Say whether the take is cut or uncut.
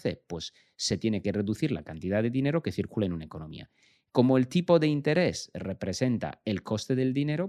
uncut